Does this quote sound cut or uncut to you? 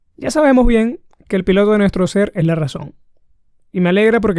uncut